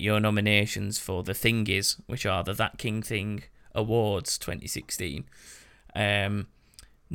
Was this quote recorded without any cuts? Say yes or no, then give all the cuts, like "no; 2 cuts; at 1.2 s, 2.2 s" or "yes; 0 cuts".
yes; 0 cuts